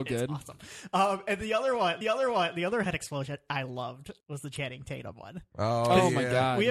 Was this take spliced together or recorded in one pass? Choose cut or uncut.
cut